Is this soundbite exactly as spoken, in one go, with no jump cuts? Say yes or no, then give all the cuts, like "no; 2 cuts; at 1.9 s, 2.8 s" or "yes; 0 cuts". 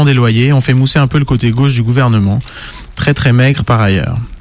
yes; 0 cuts